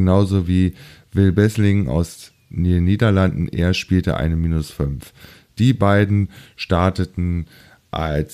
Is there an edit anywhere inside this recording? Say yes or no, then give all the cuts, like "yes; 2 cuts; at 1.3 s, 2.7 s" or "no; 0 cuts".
no; 0 cuts